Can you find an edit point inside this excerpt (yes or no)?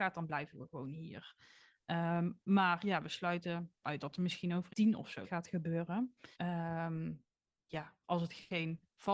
yes